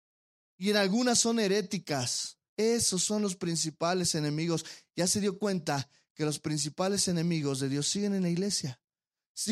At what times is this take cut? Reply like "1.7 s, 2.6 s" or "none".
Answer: 2.5 s